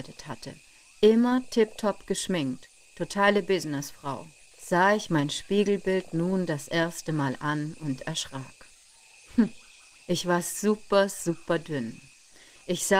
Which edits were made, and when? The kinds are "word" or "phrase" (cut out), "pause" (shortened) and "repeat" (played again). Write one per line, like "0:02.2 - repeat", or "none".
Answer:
0:04.5 - pause
0:10.0 - pause